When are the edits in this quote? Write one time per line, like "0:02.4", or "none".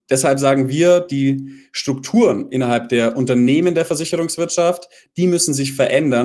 none